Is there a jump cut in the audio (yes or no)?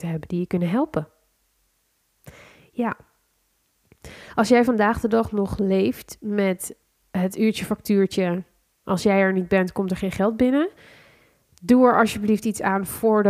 no